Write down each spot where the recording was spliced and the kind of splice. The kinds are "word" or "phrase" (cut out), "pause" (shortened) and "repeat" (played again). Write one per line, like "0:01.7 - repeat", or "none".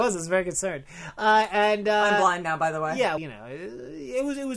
0:03.2 - word

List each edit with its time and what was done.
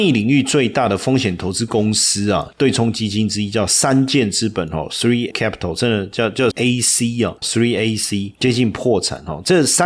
0:05.3 - word
0:06.5 - word
0:07.4 - word

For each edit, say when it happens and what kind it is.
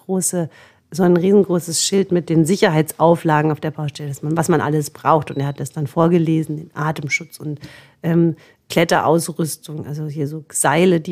none

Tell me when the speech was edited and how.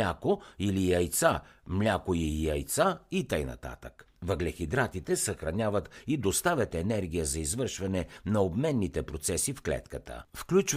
0:04.2 - pause

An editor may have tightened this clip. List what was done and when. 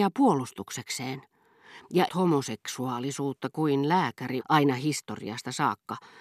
0:02.1 - word
0:04.4 - word

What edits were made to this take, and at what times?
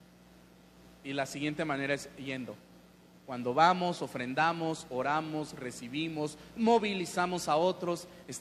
none

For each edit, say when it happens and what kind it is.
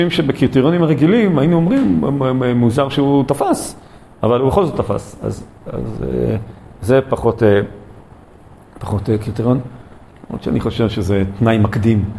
none

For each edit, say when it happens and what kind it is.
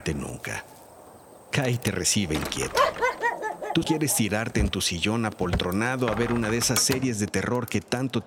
0:03.8 - word

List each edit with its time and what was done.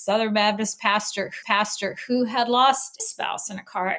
0:01.4 - repeat
0:03.0 - word

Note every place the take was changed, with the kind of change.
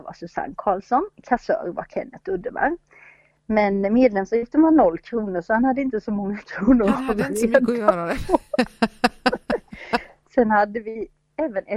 none

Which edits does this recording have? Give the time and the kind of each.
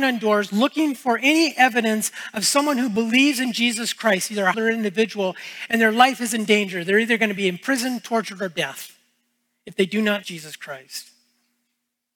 0:04.5 - word
0:10.2 - word

